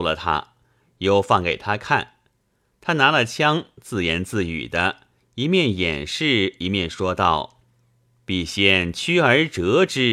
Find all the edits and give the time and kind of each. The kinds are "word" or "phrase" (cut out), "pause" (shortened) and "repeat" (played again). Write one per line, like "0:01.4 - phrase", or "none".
none